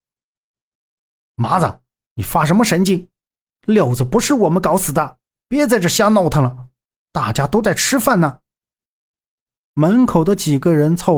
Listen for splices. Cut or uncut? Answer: uncut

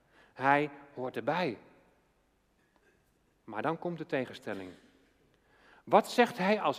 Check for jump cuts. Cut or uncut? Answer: uncut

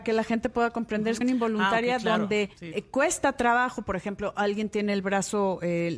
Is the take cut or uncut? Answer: cut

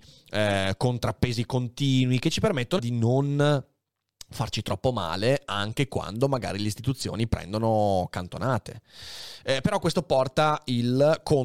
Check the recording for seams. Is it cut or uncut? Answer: cut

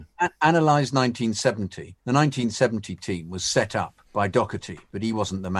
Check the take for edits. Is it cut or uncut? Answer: cut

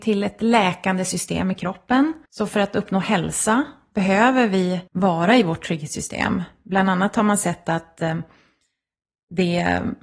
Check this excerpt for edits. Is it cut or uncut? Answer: cut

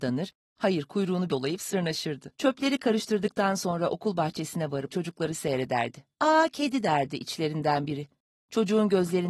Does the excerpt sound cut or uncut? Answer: cut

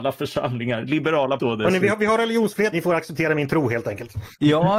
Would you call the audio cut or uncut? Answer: cut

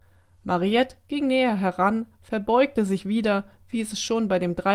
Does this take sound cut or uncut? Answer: uncut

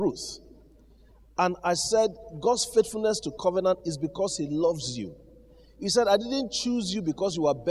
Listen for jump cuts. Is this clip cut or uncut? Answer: cut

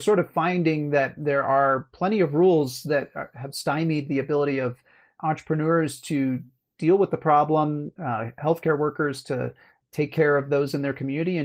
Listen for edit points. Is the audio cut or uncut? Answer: uncut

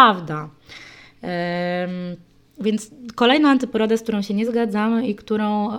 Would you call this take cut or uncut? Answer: uncut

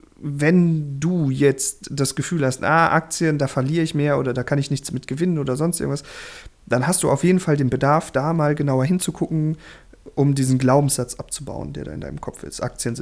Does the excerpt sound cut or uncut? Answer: uncut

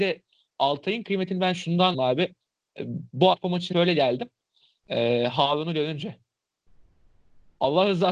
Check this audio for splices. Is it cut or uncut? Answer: cut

